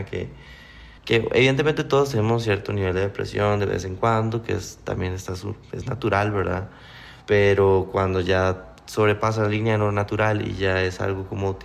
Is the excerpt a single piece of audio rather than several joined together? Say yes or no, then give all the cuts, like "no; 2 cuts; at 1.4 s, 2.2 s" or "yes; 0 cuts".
no; 2 cuts; at 1.0 s, 7.2 s